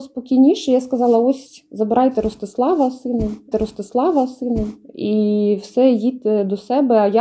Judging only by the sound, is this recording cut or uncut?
cut